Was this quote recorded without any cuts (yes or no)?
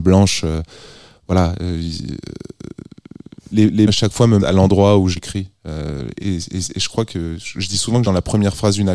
no